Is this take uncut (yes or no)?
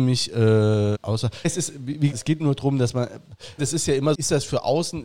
no